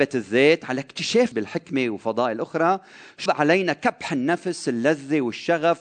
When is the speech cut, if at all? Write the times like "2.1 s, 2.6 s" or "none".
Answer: 1.3 s, 3.3 s